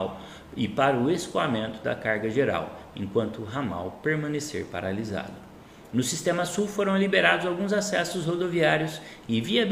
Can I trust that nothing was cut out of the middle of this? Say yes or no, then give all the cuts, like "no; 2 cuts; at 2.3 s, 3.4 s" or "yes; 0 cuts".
yes; 0 cuts